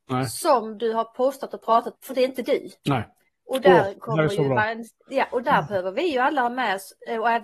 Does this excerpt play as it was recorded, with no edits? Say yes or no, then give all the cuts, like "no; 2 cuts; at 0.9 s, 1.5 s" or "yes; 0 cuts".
no; 4 cuts; at 2.0 s, 2.8 s, 5.0 s, 5.4 s